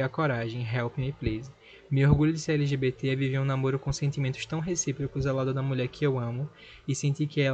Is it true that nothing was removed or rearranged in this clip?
yes; 0 cuts

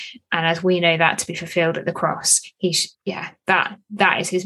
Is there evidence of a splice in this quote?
yes; 1 cut; at 2.9 s

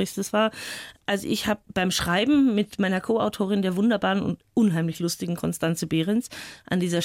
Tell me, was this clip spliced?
yes; 1 cut; at 1.0 s

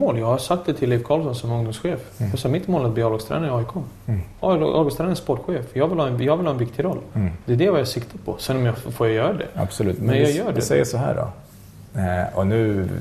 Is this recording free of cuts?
no; 1 cut; at 8.8 s

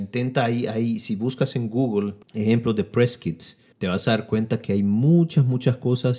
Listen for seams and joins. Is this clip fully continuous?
no; 2 cuts; at 2.2 s, 3.7 s

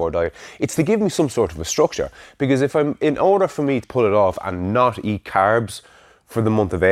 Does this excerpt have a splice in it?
yes; 1 cut; at 3.8 s

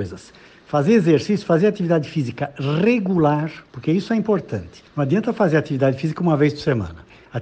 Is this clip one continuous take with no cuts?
no; 2 cuts; at 3.7 s, 4.9 s

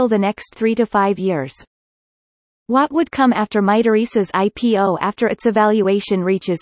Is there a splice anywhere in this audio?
no; 0 cuts

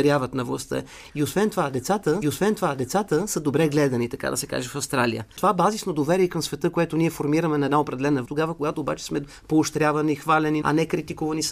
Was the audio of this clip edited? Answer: yes; 3 cuts; at 2.2 s, 8.2 s, 10.6 s

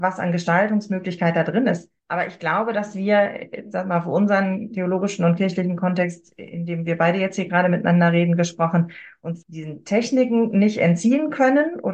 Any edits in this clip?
yes; 2 cuts; at 2.0 s, 9.4 s

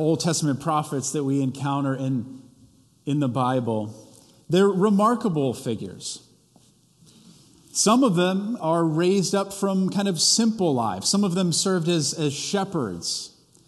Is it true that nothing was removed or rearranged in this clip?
yes; 0 cuts

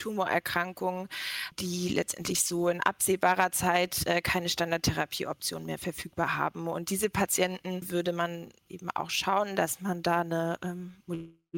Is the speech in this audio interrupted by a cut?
yes; 1 cut; at 8.7 s

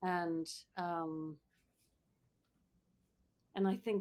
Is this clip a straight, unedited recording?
yes; 0 cuts

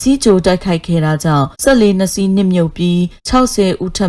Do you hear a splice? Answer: yes; 2 cuts; at 1.5 s, 3.2 s

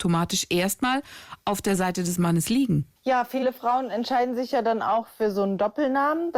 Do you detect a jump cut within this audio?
yes; 1 cut; at 3.0 s

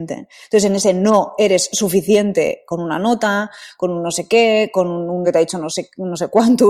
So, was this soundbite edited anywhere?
yes; 1 cut; at 5.2 s

